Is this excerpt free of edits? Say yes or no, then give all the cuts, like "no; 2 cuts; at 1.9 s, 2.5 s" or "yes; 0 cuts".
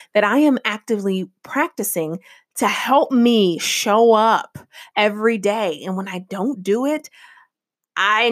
yes; 0 cuts